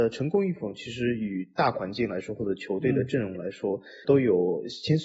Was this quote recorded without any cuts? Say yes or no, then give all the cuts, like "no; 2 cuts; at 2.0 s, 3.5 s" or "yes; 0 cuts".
yes; 0 cuts